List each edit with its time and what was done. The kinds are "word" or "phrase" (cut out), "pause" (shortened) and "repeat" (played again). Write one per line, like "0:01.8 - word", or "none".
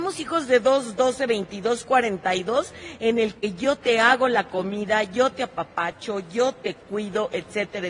none